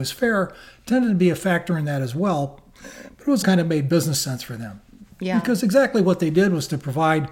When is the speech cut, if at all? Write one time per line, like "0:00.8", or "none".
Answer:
0:03.4